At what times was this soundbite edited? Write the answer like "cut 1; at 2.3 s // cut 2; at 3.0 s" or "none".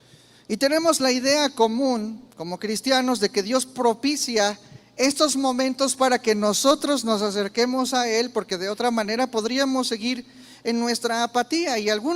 cut 1; at 2.3 s